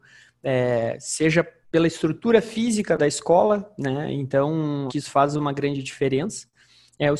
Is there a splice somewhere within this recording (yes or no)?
yes